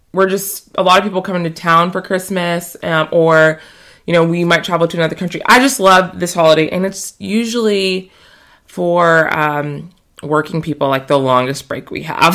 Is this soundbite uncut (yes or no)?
yes